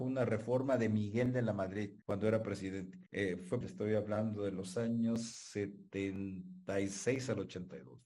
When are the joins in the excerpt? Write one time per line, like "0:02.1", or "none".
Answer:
0:02.0
0:03.1
0:03.6